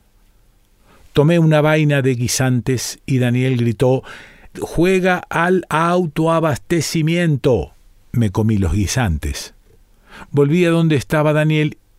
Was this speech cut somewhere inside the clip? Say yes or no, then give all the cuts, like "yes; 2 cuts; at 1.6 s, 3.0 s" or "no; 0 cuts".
yes; 2 cuts; at 4.5 s, 7.9 s